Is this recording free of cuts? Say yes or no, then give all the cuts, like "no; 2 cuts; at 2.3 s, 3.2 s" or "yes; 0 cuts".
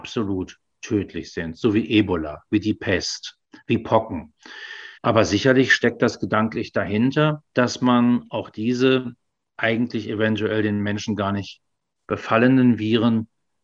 no; 2 cuts; at 5.0 s, 7.4 s